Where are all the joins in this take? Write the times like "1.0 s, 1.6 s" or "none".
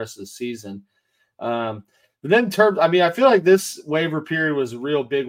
none